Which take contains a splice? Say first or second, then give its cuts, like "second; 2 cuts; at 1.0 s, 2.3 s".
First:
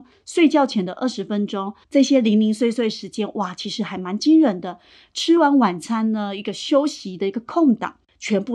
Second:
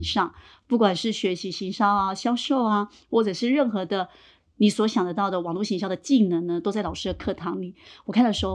first; 1 cut; at 1.8 s